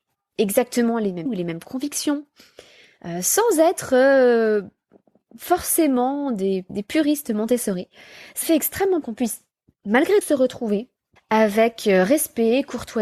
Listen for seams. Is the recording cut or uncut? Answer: cut